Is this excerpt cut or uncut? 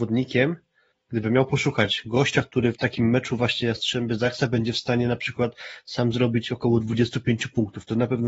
cut